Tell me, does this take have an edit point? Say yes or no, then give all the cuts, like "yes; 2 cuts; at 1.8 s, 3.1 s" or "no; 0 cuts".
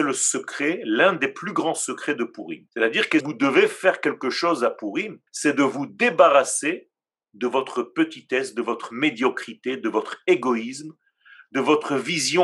yes; 3 cuts; at 2.7 s, 3.2 s, 5.3 s